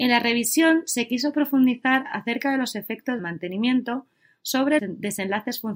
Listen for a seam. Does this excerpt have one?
yes; 2 cuts; at 3.2 s, 4.8 s

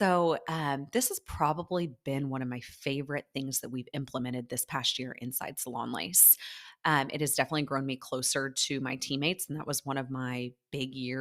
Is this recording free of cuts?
yes; 0 cuts

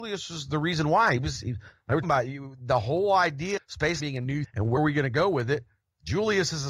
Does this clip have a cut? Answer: yes; 5 cuts; at 2.0 s, 3.6 s, 4.0 s, 4.4 s, 4.8 s

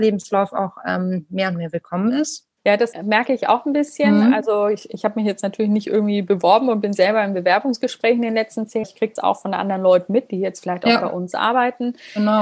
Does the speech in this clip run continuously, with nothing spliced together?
no; 4 cuts; at 2.6 s, 2.9 s, 8.8 s, 9.2 s

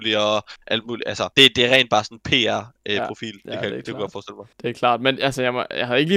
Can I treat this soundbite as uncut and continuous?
no; 2 cuts; at 1.3 s, 4.5 s

